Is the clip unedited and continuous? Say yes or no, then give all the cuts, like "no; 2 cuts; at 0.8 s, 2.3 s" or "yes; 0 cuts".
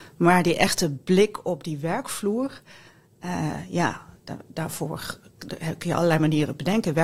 yes; 0 cuts